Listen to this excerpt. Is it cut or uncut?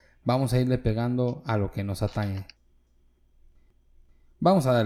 uncut